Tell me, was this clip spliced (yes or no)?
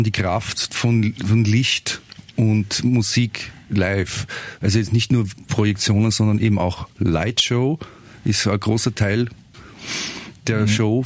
no